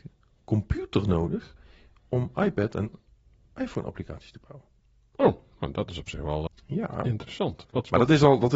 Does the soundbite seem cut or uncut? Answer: cut